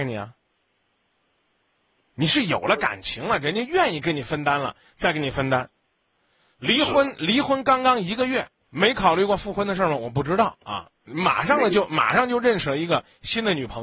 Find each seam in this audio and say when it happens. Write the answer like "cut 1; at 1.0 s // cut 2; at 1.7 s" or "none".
none

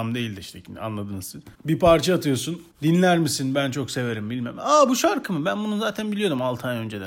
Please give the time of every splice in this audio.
cut 1; at 1.5 s // cut 2; at 2.7 s

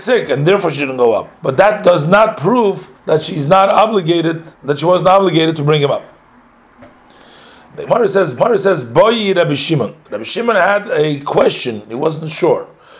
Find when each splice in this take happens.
cut 1; at 1.4 s // cut 2; at 2.9 s // cut 3; at 4.5 s // cut 4; at 8.4 s

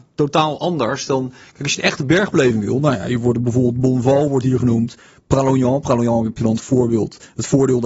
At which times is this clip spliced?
none

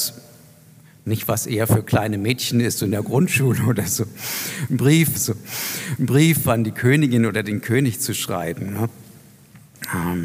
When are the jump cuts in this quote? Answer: cut 1; at 5.1 s

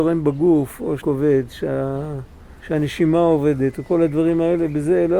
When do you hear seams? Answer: cut 1; at 1.0 s // cut 2; at 2.6 s

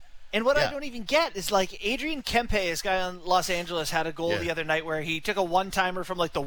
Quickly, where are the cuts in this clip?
none

